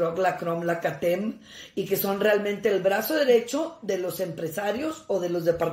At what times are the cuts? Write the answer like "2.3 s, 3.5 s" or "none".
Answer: none